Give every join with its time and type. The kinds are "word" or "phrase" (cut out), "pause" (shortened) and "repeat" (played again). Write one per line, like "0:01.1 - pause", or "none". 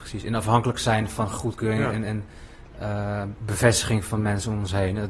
none